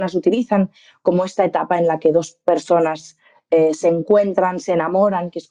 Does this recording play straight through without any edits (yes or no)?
yes